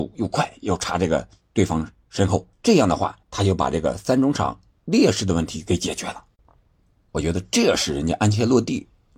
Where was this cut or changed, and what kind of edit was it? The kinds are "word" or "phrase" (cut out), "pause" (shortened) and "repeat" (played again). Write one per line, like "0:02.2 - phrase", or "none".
0:02.5 - pause
0:03.2 - pause